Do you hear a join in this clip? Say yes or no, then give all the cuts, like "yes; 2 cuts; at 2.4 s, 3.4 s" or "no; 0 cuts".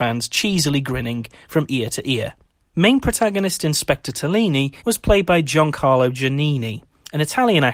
yes; 2 cuts; at 2.6 s, 4.8 s